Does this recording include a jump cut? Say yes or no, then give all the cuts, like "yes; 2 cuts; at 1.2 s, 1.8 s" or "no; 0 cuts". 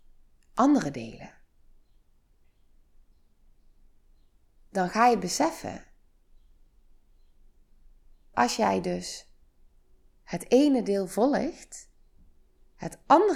yes; 1 cut; at 8.3 s